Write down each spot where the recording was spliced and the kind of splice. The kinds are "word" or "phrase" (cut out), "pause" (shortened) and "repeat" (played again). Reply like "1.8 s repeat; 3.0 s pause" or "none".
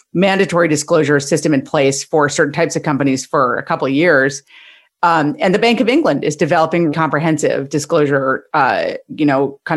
6.9 s word